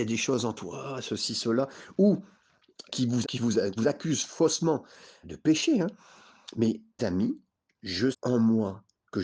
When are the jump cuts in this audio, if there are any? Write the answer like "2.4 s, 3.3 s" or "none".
2.9 s, 3.2 s, 3.8 s, 5.2 s, 7.0 s, 8.1 s